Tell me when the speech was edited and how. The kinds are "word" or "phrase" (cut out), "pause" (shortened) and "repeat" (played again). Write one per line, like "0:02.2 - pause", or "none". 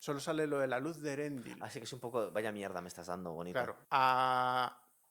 0:03.8 - pause